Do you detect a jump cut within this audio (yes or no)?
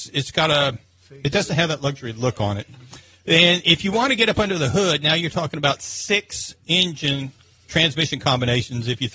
no